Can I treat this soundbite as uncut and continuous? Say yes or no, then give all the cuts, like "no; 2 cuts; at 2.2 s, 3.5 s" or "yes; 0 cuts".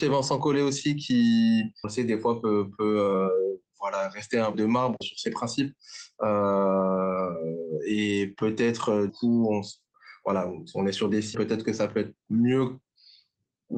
no; 5 cuts; at 1.8 s, 4.5 s, 5.0 s, 9.1 s, 11.3 s